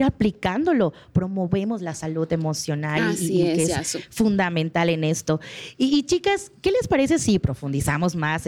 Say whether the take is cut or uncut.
uncut